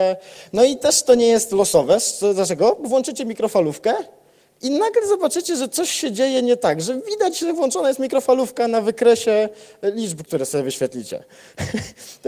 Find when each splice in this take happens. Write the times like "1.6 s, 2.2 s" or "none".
none